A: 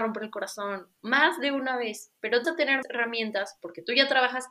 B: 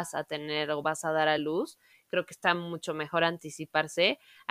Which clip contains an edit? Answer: A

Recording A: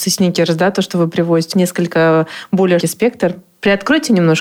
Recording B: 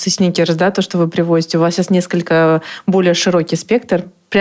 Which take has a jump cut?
A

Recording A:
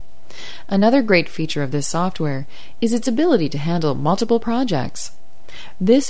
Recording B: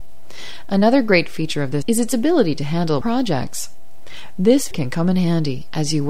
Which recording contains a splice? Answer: B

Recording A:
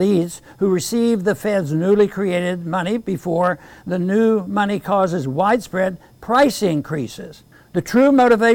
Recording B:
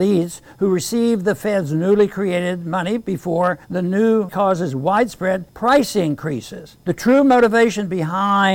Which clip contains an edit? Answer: B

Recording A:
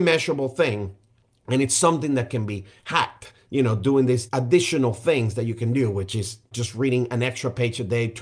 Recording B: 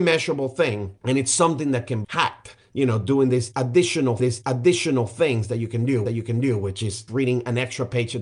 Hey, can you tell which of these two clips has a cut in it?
B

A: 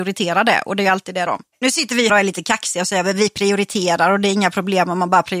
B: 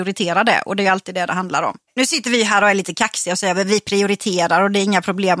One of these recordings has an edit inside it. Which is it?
A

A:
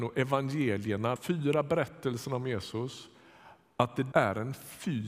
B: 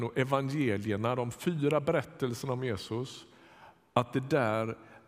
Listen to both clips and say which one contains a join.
A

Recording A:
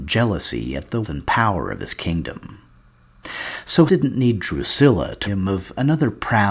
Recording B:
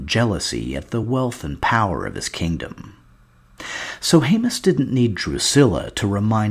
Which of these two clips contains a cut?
A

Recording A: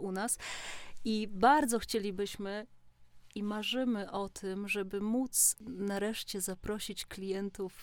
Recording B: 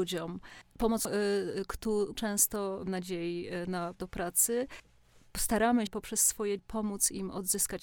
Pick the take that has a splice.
B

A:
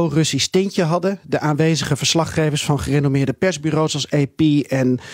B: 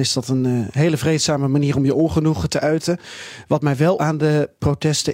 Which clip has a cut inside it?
B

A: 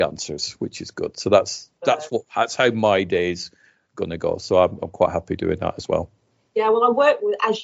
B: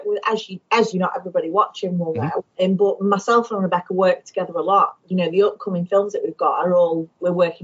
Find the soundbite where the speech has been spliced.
B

